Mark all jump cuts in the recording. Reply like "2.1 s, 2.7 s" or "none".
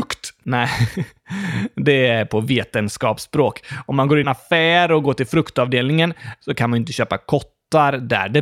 4.2 s